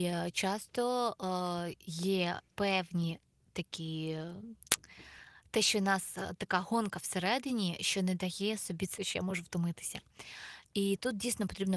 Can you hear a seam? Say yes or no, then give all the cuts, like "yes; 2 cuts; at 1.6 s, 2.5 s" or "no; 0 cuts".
yes; 2 cuts; at 2.5 s, 9.0 s